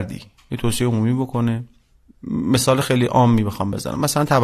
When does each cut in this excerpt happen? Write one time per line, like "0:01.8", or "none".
none